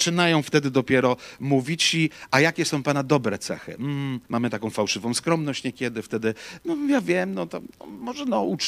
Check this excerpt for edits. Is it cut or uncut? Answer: cut